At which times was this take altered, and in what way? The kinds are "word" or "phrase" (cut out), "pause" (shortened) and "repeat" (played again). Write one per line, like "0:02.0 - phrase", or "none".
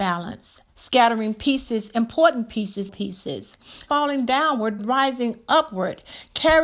0:02.9 - word
0:03.9 - word
0:04.8 - word